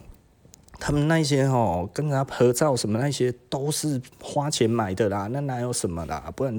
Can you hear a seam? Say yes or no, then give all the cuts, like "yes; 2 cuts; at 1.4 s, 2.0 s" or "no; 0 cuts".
yes; 1 cut; at 4.1 s